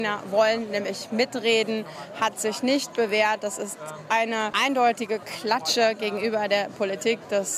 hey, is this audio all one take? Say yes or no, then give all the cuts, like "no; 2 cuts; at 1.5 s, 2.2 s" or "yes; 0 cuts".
no; 1 cut; at 4.1 s